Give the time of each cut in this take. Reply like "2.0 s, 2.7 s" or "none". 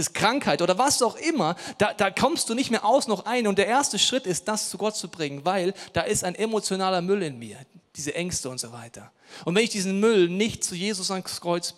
none